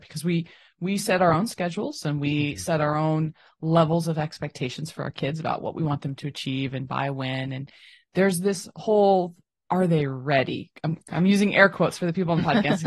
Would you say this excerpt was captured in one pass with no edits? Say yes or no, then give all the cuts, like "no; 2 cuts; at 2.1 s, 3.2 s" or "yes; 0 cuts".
yes; 0 cuts